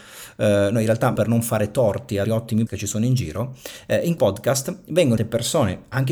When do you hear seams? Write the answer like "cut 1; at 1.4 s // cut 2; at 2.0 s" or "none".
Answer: cut 1; at 1.2 s // cut 2; at 2.2 s // cut 3; at 2.7 s // cut 4; at 4.2 s // cut 5; at 5.2 s